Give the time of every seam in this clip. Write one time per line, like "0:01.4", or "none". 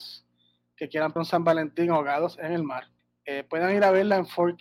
0:01.2
0:03.0